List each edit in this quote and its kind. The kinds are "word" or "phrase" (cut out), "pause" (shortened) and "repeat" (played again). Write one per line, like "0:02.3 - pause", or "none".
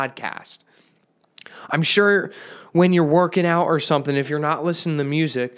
none

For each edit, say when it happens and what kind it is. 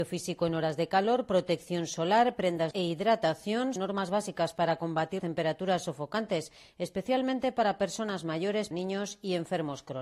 0:02.7 - word
0:03.8 - word
0:05.2 - word
0:08.7 - word

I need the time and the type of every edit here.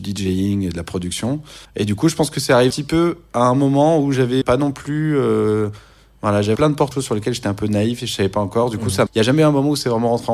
0:01.6 - pause
0:02.7 - word
0:04.4 - word
0:06.6 - word
0:06.9 - phrase
0:09.1 - word

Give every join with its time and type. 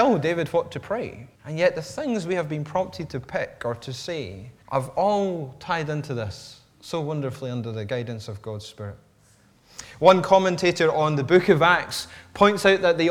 0:01.3 - pause
0:04.6 - pause

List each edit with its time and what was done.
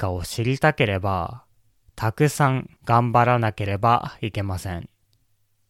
0:02.8 - pause

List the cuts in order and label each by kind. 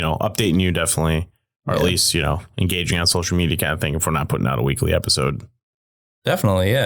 none

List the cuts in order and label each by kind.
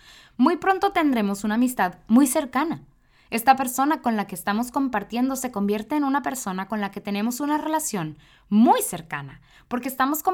none

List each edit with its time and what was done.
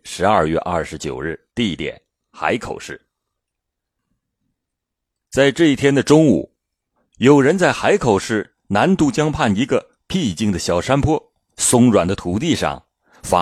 0:01.5 - pause

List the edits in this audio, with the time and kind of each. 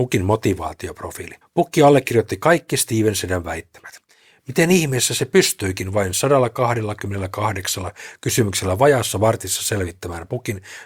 0:01.4 - pause

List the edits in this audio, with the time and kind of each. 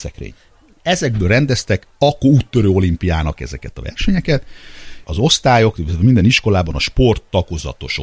0:01.9 - pause
0:03.4 - word
0:05.0 - word

